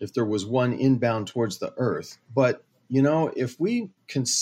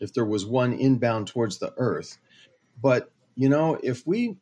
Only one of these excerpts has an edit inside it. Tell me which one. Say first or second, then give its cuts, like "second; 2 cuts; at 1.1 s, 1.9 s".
first; 1 cut; at 2.2 s